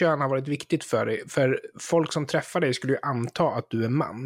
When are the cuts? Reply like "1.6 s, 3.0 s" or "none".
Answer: none